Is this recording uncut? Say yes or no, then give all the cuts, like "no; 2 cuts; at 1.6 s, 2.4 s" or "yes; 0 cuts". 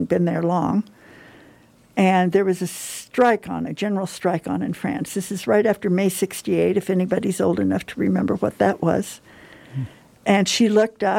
yes; 0 cuts